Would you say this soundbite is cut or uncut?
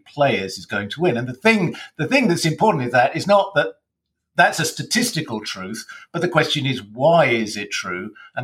uncut